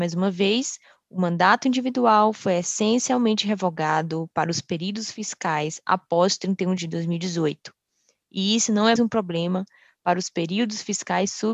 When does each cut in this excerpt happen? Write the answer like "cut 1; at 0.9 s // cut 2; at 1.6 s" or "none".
cut 1; at 6.8 s // cut 2; at 9.0 s